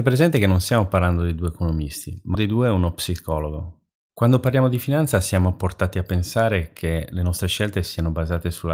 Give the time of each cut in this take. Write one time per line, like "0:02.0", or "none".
0:02.3

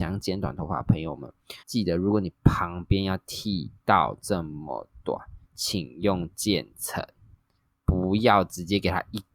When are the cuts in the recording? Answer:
0:01.6
0:05.4

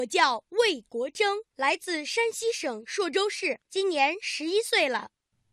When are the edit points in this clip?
0:01.5
0:03.6

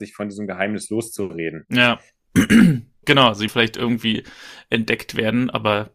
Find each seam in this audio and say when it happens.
0:03.0
0:03.5

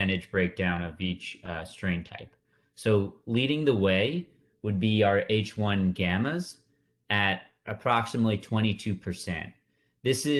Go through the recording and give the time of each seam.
none

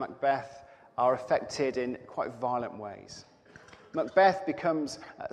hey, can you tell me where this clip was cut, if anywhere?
none

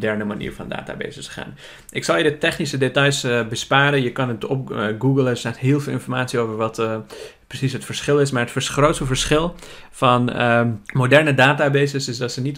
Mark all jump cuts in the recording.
0:10.8

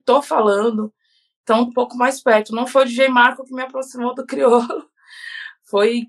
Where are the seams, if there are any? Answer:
0:01.7

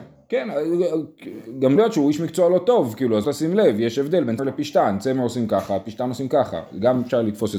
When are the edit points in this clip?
0:01.8
0:03.2
0:04.4

